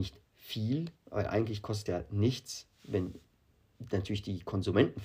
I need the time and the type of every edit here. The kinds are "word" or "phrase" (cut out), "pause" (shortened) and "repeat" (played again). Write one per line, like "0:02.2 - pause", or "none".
0:01.0 - pause
0:01.9 - word